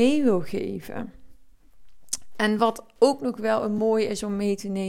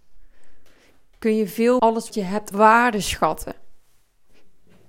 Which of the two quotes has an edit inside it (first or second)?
second